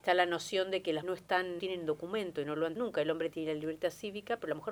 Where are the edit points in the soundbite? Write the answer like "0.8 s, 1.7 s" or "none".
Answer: 1.0 s, 1.6 s, 2.8 s